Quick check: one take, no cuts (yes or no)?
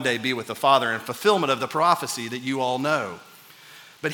yes